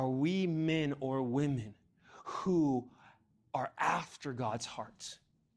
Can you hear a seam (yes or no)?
no